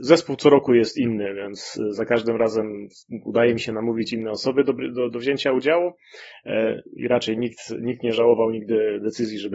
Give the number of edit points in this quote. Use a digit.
1